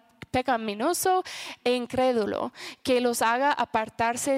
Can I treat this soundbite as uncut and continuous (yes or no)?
yes